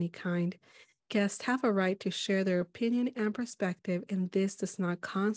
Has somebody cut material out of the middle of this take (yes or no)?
no